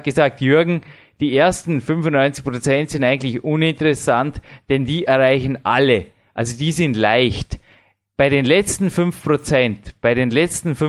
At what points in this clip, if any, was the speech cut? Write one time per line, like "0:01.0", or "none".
none

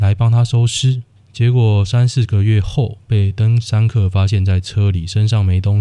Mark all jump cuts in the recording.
0:01.2

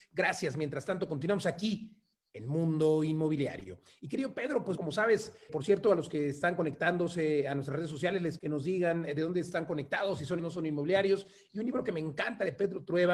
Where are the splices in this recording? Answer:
0:04.8
0:05.5
0:08.4
0:10.4

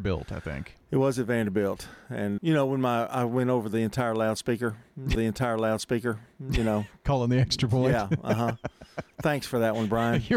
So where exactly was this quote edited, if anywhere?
0:02.4
0:05.2

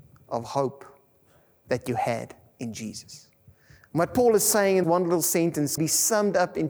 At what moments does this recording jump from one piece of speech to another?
0:04.8
0:05.8

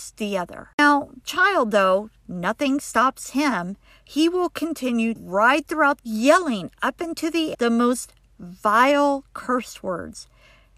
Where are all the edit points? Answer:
0:01.2
0:05.2
0:06.0
0:07.5

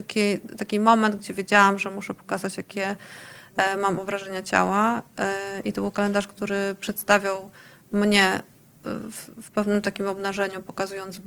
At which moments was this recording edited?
none

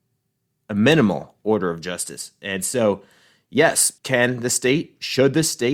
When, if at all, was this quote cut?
0:04.0

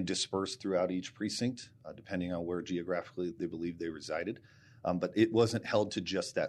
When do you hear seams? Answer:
0:03.3

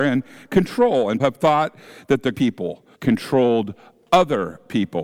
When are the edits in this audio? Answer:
0:01.2
0:02.3
0:02.9

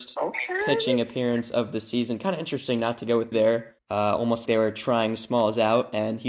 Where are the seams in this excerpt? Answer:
0:03.3
0:03.8
0:04.5

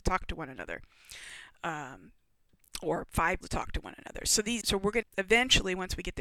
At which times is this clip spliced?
0:02.5
0:03.4
0:04.6
0:05.0

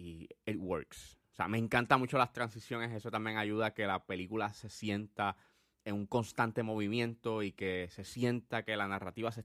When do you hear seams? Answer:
none

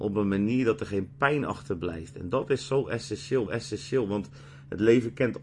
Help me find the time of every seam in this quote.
0:03.5

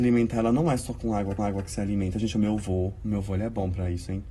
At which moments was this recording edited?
0:01.4

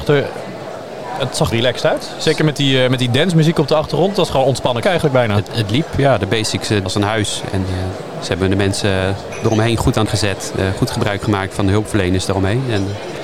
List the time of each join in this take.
0:01.5
0:04.8
0:05.5
0:06.9
0:10.1

